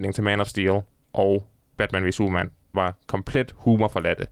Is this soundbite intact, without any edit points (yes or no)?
no